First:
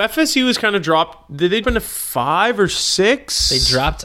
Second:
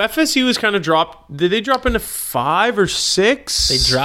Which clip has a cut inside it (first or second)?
first